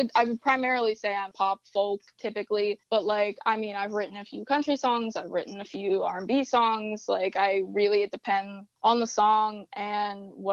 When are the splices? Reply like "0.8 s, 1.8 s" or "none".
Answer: 1.3 s, 2.8 s, 8.8 s